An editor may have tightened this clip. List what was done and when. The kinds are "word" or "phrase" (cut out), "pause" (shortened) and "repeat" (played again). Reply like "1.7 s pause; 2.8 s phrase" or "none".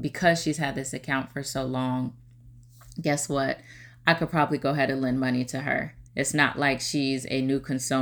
6.1 s pause